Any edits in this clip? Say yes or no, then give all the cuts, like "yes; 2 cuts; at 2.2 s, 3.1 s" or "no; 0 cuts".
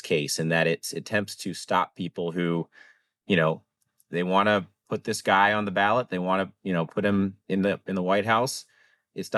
no; 0 cuts